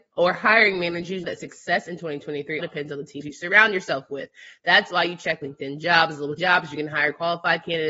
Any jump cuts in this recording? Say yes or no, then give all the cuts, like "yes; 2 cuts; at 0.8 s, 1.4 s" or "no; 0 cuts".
yes; 5 cuts; at 1.2 s, 2.6 s, 3.2 s, 5.4 s, 6.4 s